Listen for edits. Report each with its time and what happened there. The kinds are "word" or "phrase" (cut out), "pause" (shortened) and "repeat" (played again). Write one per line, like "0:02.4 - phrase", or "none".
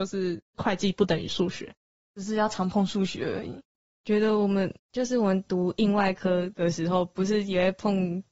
none